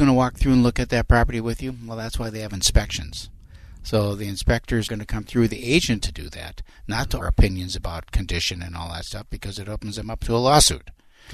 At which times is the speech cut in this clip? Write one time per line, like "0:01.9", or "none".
0:04.9
0:06.0
0:07.2

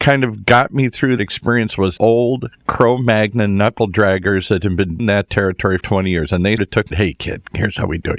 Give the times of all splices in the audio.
0:01.2
0:02.0
0:05.0
0:05.8
0:06.6
0:06.9

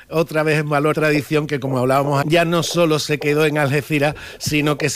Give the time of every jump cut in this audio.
0:00.9
0:02.2

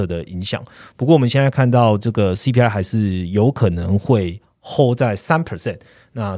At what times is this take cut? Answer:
none

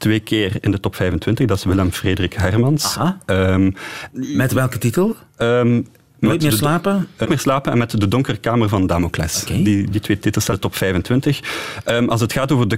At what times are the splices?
0:04.1
0:06.0
0:07.2
0:09.9
0:10.5

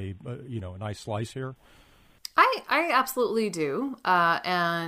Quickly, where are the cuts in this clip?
none

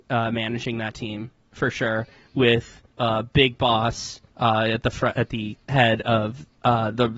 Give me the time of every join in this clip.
0:02.9
0:04.3
0:05.6

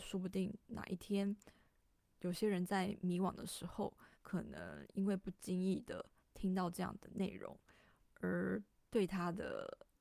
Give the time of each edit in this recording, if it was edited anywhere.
0:02.0
0:04.1
0:06.2
0:08.7

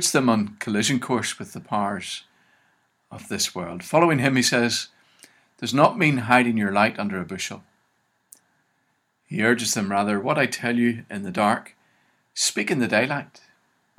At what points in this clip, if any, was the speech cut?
none

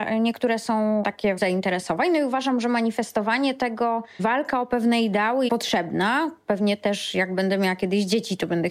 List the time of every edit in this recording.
0:01.4
0:04.2
0:05.5

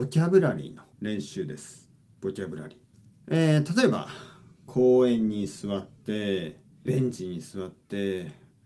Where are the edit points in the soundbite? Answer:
0:00.9
0:02.0
0:02.9
0:06.9

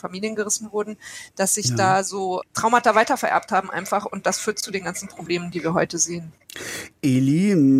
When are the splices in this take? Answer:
none

